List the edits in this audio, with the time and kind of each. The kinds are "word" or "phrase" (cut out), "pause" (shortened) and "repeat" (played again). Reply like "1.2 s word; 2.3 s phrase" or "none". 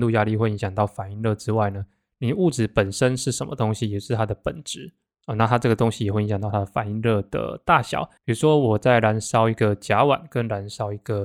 8.2 s pause